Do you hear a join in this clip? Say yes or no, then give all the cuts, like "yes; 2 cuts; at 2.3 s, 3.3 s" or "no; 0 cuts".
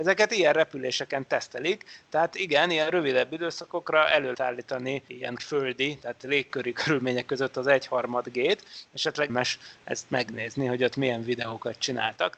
yes; 3 cuts; at 4.3 s, 5.4 s, 9.3 s